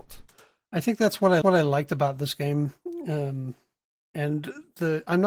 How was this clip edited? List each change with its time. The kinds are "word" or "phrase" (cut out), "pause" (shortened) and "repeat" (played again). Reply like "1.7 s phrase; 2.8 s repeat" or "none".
1.4 s repeat